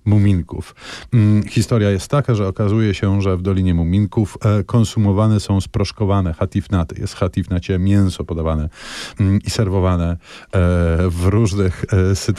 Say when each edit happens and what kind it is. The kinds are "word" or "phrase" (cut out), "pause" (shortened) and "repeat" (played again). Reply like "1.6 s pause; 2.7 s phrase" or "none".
9.2 s word